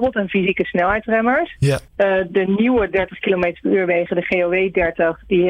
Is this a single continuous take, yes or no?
no